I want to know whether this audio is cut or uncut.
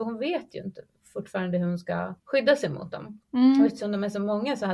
cut